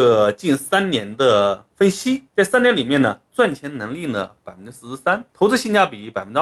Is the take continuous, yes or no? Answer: no